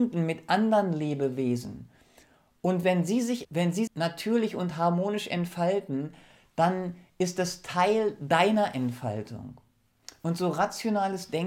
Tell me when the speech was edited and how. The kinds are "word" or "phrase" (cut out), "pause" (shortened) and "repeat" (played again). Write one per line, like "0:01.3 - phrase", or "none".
0:03.4 - word
0:03.9 - word